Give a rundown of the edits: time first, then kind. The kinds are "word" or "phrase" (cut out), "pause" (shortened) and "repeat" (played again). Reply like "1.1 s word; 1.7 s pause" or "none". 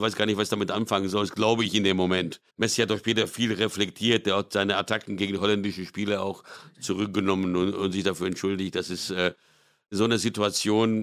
2.5 s pause